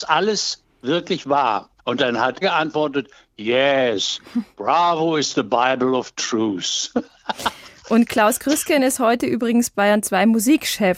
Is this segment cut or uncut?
cut